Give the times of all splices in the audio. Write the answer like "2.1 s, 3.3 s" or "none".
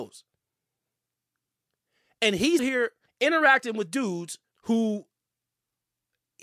2.6 s, 3.1 s, 4.5 s